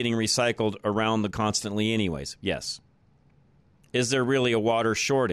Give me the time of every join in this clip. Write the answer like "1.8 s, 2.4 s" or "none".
1.3 s